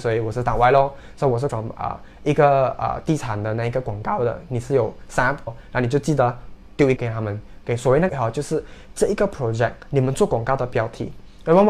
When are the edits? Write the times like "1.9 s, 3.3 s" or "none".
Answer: 1.5 s, 5.5 s, 7.0 s, 8.1 s